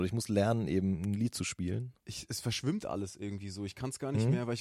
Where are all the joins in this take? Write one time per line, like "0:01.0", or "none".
0:02.0